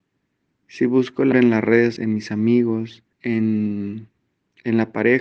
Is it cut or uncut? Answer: cut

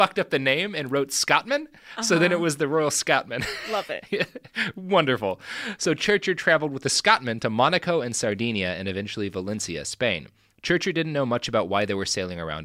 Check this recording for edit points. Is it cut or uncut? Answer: uncut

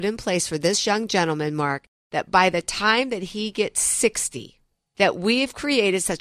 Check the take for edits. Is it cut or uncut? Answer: uncut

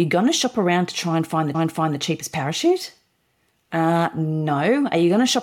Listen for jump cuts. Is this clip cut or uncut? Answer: cut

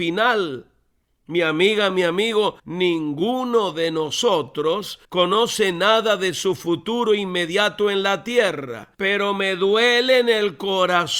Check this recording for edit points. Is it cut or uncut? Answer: cut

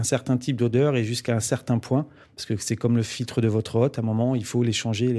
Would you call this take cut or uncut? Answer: uncut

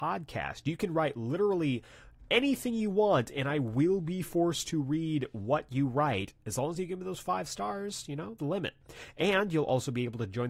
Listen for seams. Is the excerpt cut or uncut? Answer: cut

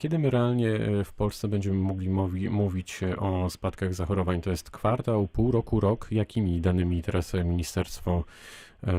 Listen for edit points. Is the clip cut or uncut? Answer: uncut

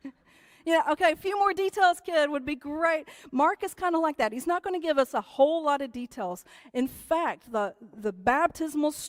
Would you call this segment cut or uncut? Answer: uncut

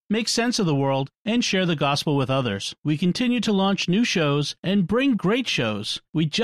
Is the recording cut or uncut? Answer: cut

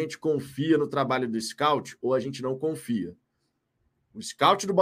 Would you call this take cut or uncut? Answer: uncut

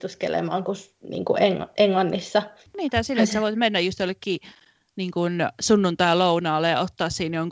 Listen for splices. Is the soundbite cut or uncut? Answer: uncut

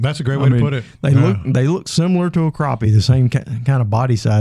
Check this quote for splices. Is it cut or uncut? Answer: uncut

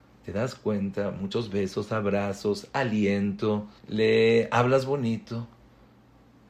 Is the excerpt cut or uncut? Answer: cut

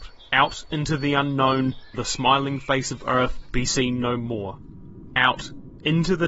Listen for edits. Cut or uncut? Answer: cut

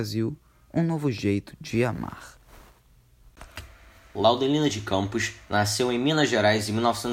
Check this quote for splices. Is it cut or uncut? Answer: uncut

